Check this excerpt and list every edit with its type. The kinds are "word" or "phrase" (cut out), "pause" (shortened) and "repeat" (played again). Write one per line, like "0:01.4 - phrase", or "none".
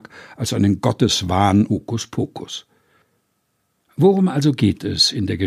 0:01.7 - word